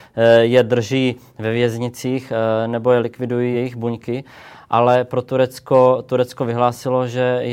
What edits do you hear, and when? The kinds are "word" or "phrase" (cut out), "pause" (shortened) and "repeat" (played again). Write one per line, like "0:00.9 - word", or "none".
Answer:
none